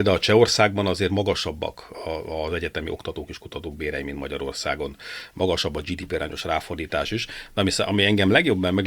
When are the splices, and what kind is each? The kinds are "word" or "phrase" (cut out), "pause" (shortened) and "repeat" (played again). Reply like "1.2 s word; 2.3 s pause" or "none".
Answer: none